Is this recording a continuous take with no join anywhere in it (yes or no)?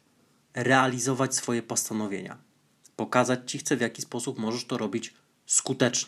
yes